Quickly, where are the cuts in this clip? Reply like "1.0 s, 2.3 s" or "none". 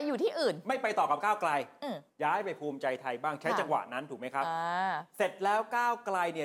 2.1 s